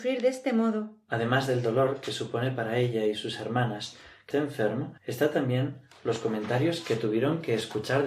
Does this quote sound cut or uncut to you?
cut